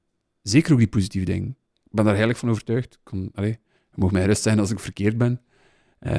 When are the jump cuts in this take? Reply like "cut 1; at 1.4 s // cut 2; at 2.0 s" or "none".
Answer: cut 1; at 1.7 s